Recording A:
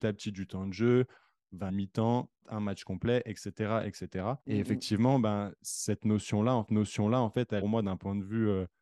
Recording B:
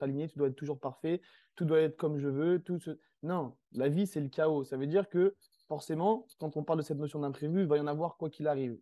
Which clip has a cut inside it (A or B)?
A